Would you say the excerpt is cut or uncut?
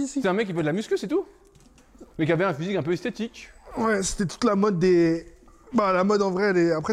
uncut